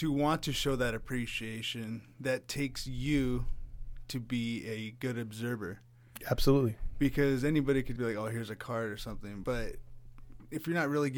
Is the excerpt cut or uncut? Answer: cut